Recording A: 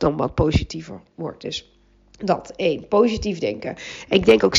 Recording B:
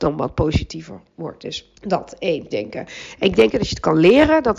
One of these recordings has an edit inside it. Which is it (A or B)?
B